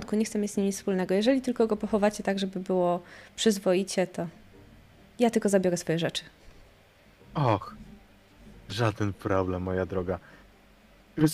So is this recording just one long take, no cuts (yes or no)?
yes